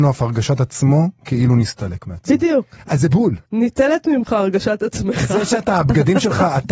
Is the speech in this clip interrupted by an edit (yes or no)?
yes